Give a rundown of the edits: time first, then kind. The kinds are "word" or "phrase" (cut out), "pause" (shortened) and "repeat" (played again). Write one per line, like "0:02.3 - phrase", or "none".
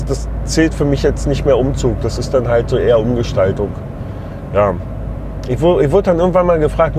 none